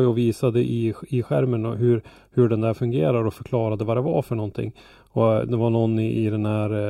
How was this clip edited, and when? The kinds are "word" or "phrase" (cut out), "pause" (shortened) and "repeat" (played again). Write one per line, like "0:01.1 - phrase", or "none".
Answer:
none

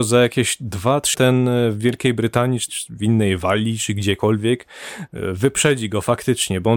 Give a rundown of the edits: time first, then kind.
0:01.1 - word
0:02.7 - phrase

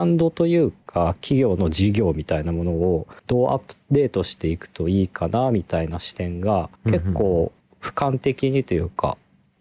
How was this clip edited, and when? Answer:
0:03.2 - pause
0:06.8 - pause
0:07.6 - pause

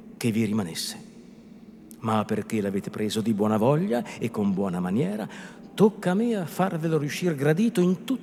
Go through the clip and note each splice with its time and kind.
none

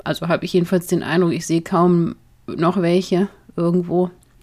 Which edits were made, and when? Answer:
none

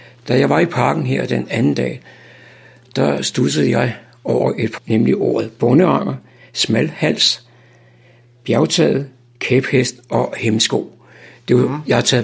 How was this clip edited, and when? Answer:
0:04.8 - word

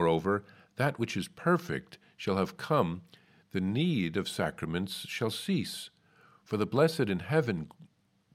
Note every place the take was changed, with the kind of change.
none

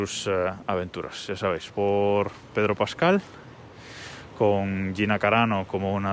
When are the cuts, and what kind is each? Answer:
0:01.7 - word

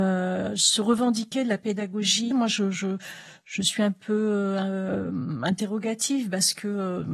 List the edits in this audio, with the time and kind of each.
0:02.3 - word

